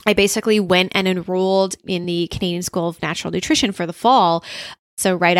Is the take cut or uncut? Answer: uncut